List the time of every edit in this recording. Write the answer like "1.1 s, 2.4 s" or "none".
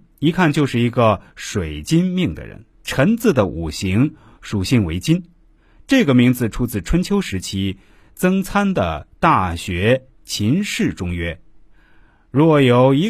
2.7 s